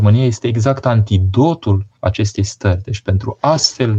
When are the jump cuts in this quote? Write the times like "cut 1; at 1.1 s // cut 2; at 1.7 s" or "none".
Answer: cut 1; at 2.0 s